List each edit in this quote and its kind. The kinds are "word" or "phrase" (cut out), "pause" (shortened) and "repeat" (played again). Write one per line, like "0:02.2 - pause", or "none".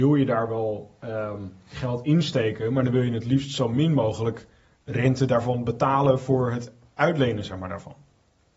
none